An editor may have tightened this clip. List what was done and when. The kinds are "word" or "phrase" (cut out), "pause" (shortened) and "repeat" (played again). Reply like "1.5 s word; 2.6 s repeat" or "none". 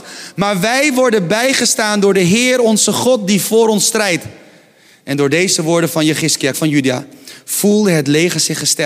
6.5 s word